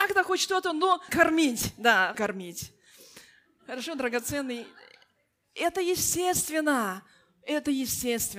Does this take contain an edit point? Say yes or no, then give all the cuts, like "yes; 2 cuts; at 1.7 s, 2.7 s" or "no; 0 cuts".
yes; 2 cuts; at 1.1 s, 2.1 s